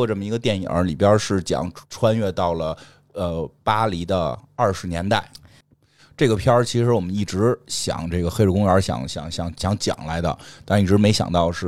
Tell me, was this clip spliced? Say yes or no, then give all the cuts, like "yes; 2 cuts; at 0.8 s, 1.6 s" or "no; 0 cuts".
yes; 1 cut; at 1.8 s